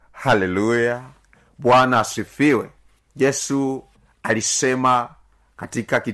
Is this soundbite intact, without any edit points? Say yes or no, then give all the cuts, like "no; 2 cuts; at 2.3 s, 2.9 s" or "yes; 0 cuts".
yes; 0 cuts